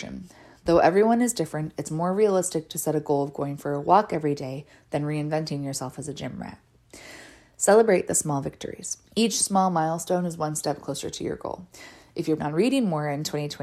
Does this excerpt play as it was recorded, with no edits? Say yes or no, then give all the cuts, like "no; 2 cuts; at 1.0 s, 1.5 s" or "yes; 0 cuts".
no; 2 cuts; at 9.1 s, 12.4 s